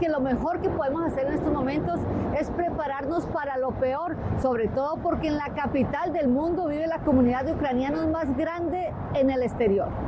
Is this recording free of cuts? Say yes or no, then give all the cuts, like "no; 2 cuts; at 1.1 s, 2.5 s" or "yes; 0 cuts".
yes; 0 cuts